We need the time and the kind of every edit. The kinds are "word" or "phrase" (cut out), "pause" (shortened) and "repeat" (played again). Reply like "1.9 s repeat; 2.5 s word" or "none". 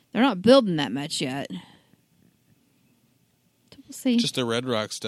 none

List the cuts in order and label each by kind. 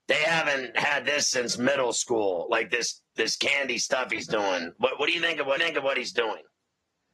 5.6 s repeat

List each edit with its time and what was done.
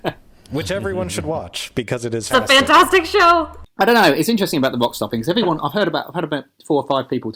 2.3 s word

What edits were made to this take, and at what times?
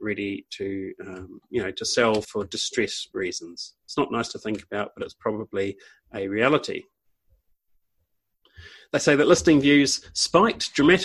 2.2 s word

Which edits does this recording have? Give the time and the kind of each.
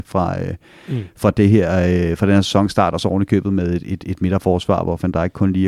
none

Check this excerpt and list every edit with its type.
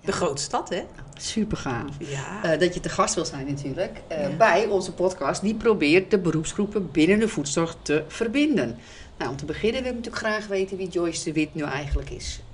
none

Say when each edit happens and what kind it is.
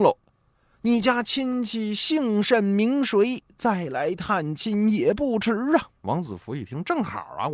5.9 s pause

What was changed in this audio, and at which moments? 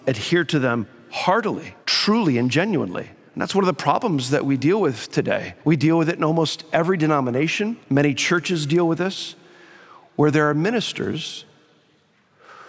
1.8 s pause; 3.3 s pause; 5.6 s pause; 7.8 s pause

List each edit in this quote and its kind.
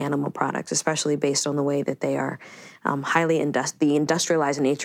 none

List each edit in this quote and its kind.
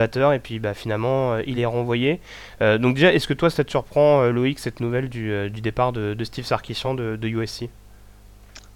none

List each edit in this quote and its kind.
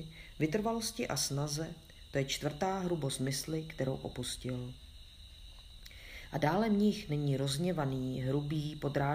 none

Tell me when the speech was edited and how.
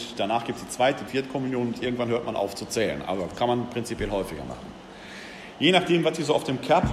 1.1 s word

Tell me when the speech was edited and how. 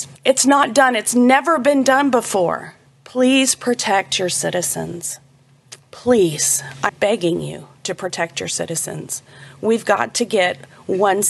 6.9 s word; 7.8 s pause

